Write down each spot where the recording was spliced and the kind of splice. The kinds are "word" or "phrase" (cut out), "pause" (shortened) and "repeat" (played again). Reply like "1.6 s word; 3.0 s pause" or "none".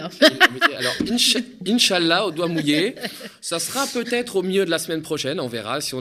none